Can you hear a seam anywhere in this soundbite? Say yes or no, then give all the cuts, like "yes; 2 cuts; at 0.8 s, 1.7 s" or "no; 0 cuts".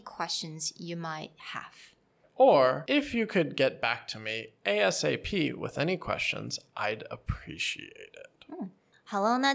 no; 0 cuts